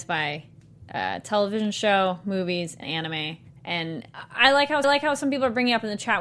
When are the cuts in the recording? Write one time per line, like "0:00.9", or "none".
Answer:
0:02.8
0:03.5
0:04.8